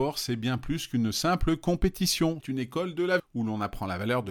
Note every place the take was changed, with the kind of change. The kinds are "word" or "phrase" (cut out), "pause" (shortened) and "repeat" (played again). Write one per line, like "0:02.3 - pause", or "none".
0:02.4 - word
0:03.2 - word